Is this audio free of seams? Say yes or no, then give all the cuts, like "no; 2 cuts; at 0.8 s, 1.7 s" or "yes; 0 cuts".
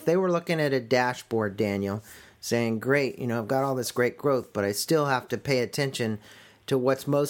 yes; 0 cuts